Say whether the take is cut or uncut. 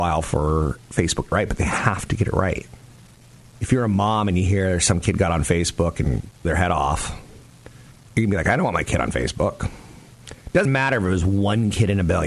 cut